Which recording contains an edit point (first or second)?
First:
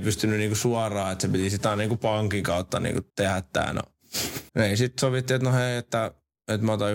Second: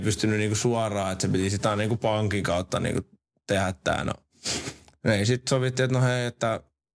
first